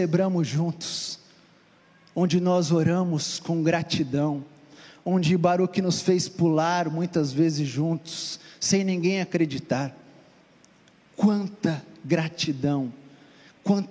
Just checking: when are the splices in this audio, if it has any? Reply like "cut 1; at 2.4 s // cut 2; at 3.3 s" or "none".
none